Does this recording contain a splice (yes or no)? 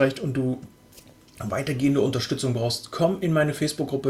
no